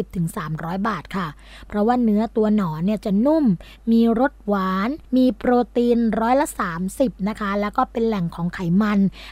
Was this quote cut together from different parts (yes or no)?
yes